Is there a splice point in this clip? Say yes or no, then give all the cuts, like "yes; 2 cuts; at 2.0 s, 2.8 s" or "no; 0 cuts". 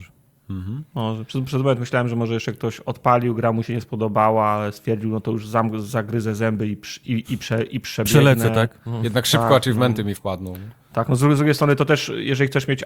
no; 0 cuts